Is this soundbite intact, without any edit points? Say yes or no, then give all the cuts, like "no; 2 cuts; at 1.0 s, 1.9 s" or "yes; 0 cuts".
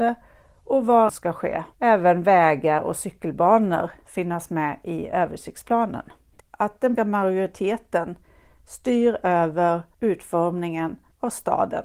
no; 5 cuts; at 1.1 s, 1.7 s, 4.1 s, 6.4 s, 7.0 s